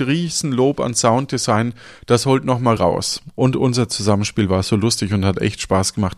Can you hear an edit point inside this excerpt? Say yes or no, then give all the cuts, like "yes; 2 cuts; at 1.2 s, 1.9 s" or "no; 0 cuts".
yes; 1 cut; at 2.8 s